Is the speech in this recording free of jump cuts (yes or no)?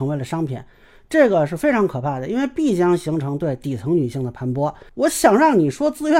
no